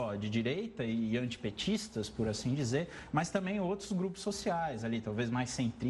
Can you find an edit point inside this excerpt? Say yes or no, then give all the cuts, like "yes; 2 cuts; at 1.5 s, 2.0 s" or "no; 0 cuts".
no; 0 cuts